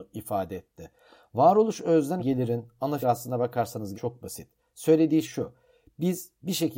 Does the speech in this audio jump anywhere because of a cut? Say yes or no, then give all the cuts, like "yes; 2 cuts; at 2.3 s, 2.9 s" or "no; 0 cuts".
yes; 4 cuts; at 2.2 s, 3.0 s, 3.9 s, 5.2 s